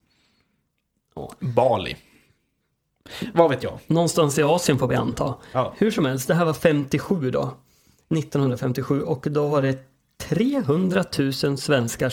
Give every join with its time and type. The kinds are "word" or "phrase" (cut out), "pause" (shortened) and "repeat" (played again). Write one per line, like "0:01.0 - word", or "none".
none